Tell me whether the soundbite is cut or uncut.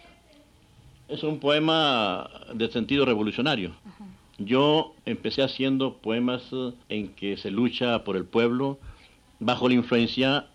cut